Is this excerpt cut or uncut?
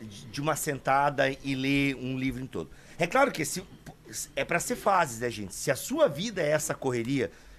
uncut